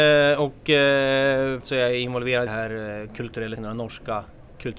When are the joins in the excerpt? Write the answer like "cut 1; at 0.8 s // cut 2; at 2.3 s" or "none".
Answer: cut 1; at 1.6 s // cut 2; at 2.5 s // cut 3; at 3.6 s